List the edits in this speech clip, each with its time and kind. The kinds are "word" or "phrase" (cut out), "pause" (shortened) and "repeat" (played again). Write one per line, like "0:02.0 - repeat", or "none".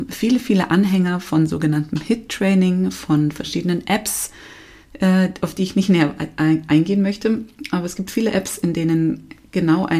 none